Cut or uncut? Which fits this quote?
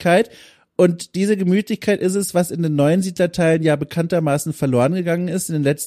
uncut